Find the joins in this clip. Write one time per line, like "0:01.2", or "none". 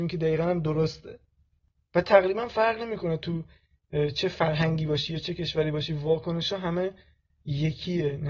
none